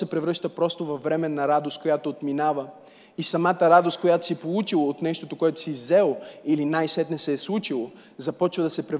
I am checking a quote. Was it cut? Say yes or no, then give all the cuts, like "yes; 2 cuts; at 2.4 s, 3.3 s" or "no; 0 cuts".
no; 0 cuts